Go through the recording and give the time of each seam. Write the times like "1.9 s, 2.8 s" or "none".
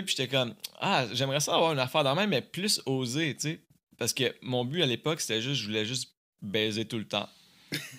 none